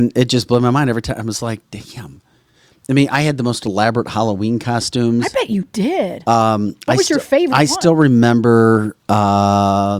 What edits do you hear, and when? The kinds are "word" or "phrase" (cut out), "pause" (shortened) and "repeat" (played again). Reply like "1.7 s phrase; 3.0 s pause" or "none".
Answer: none